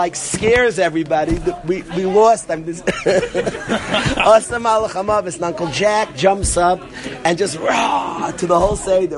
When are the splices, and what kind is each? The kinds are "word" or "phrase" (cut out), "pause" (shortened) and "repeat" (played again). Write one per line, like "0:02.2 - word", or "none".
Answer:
none

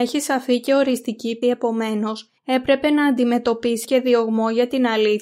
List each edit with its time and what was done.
0:01.4 - word
0:02.4 - pause
0:03.8 - word

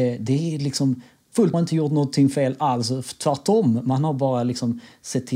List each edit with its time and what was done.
0:01.5 - phrase

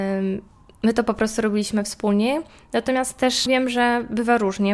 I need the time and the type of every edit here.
0:03.5 - word

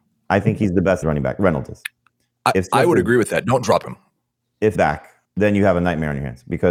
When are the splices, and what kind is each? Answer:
0:01.0 - word
0:04.7 - phrase
0:05.2 - pause

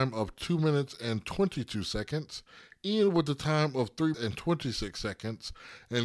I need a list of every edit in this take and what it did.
0:04.1 - word

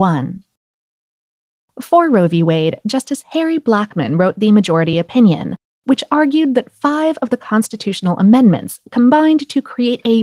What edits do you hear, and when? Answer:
none

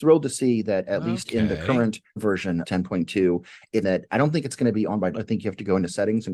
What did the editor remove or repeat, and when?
0:02.2 - word
0:02.6 - word
0:03.8 - phrase
0:05.1 - word

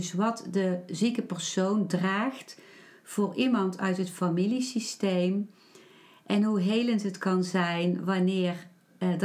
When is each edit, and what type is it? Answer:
none

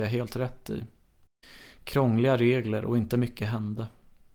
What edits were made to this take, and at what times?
none

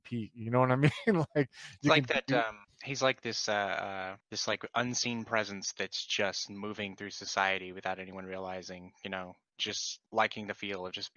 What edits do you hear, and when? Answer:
0:02.6 - pause
0:04.2 - pause
0:10.1 - pause

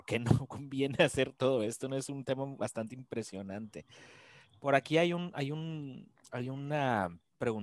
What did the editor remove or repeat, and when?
none

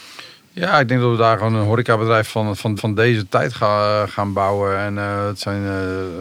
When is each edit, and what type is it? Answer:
0:02.3 - word
0:02.8 - repeat

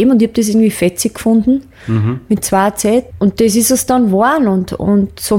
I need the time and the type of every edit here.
0:03.1 - word

